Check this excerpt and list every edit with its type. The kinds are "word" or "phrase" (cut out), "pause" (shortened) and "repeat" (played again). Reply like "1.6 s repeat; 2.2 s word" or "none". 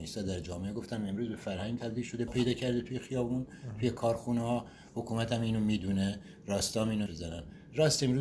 1.8 s word; 2.3 s word; 7.1 s phrase